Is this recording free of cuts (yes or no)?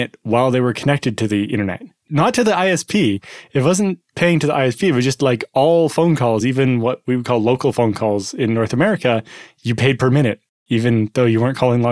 yes